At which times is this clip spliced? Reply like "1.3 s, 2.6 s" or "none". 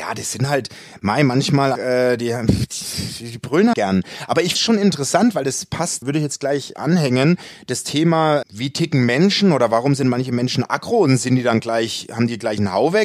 1.8 s, 3.7 s, 4.6 s, 6.0 s, 6.7 s, 8.4 s

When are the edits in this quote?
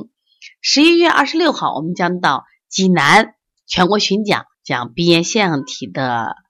4.5 s

